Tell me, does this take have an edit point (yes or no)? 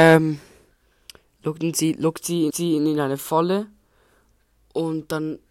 yes